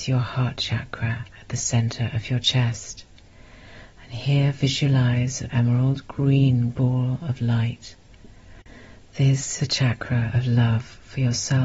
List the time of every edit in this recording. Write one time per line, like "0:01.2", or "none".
0:05.5
0:06.7
0:09.6